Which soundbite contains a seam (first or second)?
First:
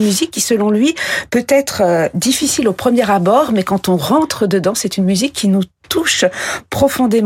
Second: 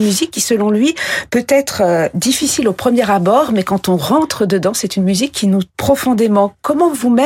second